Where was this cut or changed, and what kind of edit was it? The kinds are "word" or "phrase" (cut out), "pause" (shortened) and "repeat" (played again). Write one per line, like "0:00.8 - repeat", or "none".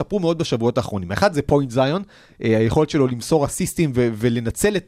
none